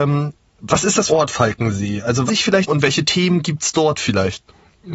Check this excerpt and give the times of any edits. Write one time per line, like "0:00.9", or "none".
0:01.1
0:02.3
0:02.7